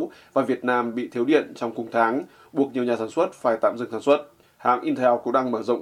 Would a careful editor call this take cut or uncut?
uncut